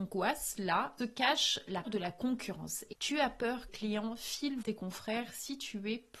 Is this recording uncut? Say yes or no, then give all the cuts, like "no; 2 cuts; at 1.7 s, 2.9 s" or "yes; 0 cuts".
no; 5 cuts; at 1.0 s, 1.8 s, 2.9 s, 3.7 s, 4.6 s